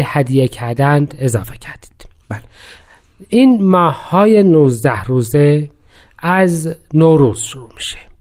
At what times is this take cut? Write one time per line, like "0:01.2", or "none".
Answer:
none

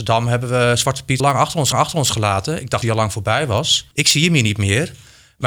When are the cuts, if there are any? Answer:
0:01.2
0:01.7
0:02.8
0:03.9

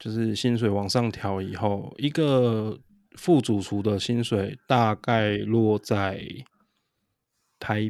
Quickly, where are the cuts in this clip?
none

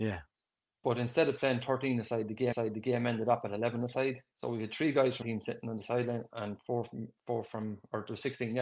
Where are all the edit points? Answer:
0:02.5
0:04.3
0:05.2
0:07.2

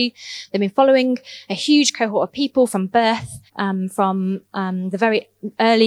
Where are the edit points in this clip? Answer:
0:03.5

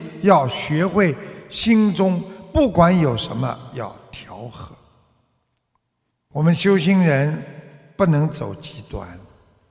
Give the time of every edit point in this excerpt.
none

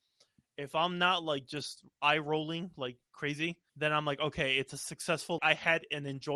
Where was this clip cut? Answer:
0:03.7
0:05.4

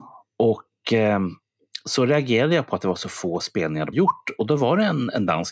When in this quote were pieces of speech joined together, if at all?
0:03.9

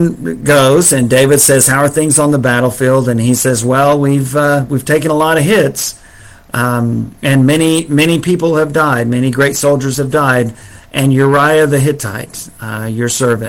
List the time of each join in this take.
none

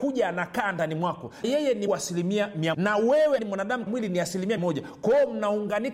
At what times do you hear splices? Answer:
0:01.4
0:01.9
0:02.7
0:03.4
0:03.9
0:04.6

